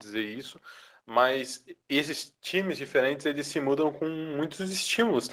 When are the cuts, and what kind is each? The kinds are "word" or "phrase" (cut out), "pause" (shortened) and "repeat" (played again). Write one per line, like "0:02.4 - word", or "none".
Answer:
none

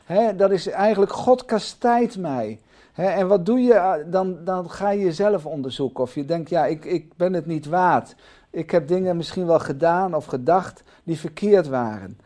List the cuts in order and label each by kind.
none

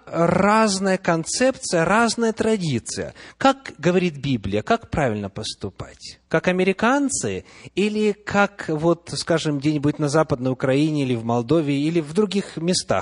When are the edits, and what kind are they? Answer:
0:06.3 - pause

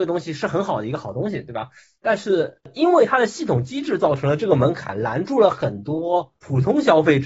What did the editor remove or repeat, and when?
none

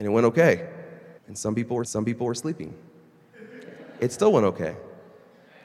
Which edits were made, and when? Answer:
0:01.2 - pause
0:01.8 - repeat

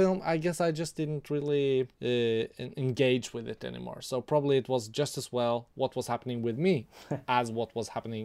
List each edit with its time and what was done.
0:01.9 - pause

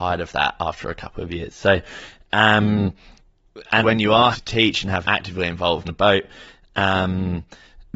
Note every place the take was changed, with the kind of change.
0:03.8 - word
0:04.3 - word
0:05.0 - word
0:05.8 - word

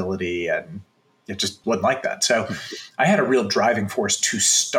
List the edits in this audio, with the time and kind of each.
0:01.6 - word

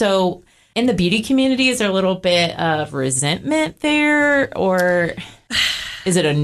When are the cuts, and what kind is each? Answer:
none

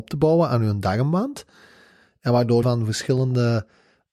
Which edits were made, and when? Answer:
0:02.6 - phrase

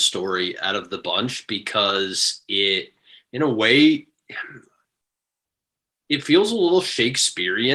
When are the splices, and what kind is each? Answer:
none

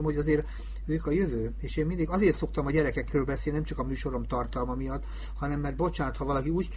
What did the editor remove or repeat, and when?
none

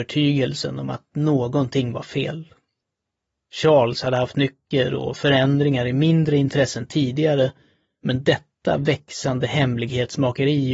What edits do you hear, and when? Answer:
none

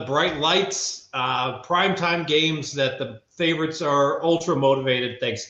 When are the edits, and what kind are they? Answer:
none

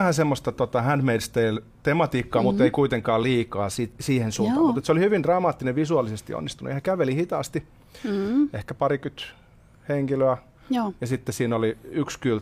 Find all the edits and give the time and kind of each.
none

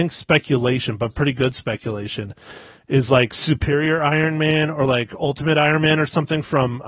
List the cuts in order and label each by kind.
none

